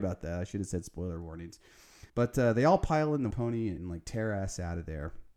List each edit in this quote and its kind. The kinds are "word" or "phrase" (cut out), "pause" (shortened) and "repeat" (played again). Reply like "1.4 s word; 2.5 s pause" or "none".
2.1 s pause; 3.3 s word; 3.8 s word